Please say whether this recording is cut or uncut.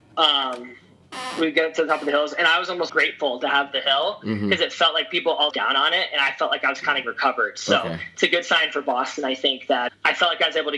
cut